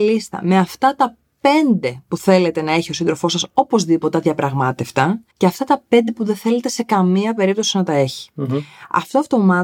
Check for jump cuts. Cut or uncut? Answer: cut